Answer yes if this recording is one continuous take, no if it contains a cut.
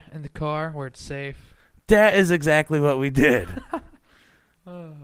yes